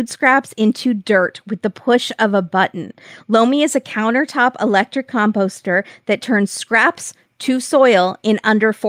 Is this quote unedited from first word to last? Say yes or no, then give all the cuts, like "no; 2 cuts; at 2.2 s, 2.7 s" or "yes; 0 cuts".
yes; 0 cuts